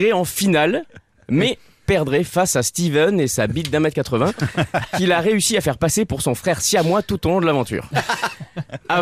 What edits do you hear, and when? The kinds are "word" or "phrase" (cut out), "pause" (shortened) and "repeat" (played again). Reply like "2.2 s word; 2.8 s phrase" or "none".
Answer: none